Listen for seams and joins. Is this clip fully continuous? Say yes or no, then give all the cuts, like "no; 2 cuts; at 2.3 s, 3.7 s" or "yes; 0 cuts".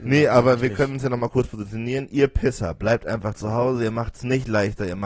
yes; 0 cuts